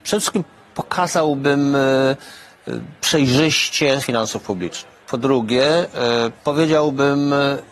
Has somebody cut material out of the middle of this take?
yes; 2 cuts; at 4.0 s, 5.0 s

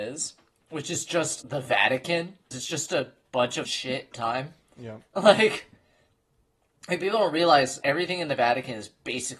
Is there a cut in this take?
yes; 5 cuts; at 1.4 s, 2.5 s, 3.6 s, 4.1 s, 7.8 s

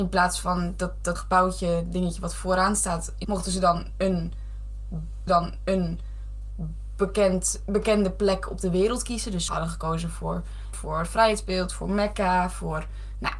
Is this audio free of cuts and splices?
no; 5 cuts; at 1.2 s, 3.2 s, 5.3 s, 9.5 s, 10.7 s

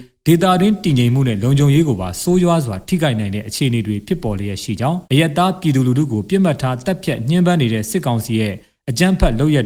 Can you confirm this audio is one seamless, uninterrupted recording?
no; 1 cut; at 5.0 s

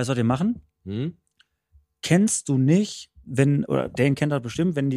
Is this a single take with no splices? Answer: yes; 0 cuts

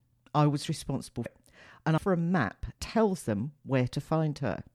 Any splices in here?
yes; 3 cuts; at 1.3 s, 2.0 s, 2.8 s

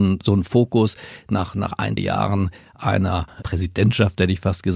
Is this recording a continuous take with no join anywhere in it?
no; 2 cuts; at 2.0 s, 3.4 s

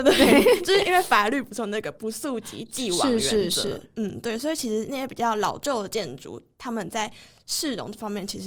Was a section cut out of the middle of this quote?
no; 0 cuts

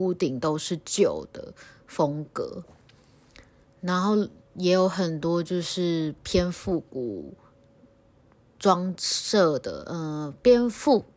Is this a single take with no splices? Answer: yes; 0 cuts

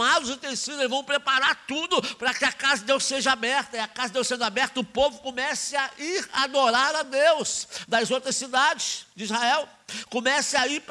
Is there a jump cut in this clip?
no; 0 cuts

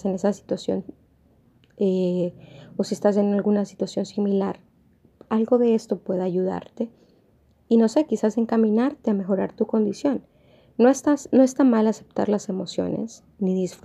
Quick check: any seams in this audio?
no; 0 cuts

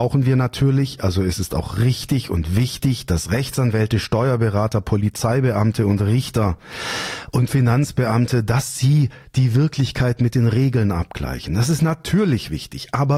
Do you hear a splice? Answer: no; 0 cuts

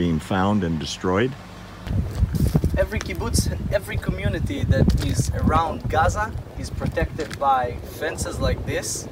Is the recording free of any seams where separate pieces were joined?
yes; 0 cuts

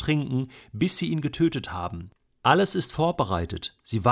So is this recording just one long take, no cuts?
yes; 0 cuts

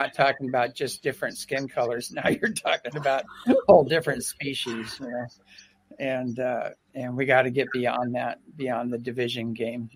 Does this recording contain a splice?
no; 0 cuts

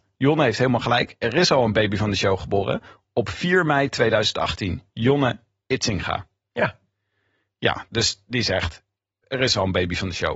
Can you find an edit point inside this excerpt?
no; 0 cuts

